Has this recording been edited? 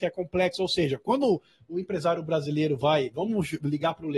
no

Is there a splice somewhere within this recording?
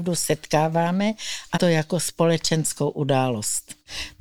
yes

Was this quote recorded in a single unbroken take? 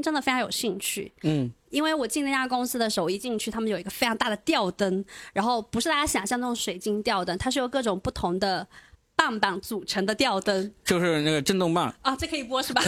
no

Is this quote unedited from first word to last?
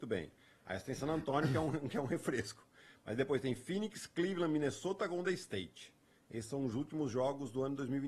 yes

